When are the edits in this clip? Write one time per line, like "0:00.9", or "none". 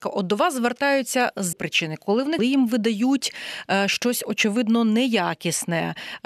0:01.5
0:02.4